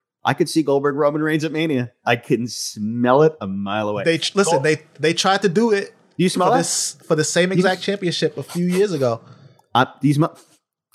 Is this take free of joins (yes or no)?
yes